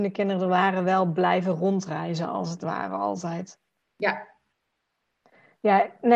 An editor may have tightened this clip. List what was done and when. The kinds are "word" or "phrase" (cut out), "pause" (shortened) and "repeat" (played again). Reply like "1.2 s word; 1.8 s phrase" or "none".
3.8 s pause